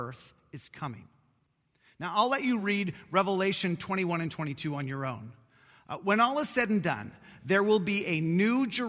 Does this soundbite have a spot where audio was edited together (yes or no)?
no